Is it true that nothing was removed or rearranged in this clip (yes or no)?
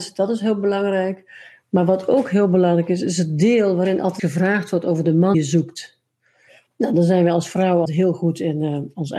no